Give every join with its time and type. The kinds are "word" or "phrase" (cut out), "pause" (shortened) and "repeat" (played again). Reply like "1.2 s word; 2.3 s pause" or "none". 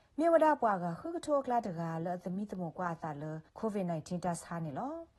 3.5 s pause